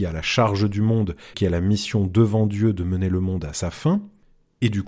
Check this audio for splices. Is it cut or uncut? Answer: cut